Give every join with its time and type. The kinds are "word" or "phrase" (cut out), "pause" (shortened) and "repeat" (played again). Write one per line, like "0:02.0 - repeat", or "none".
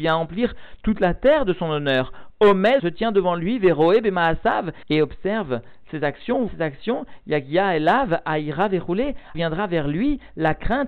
0:02.8 - word
0:06.5 - word
0:09.3 - word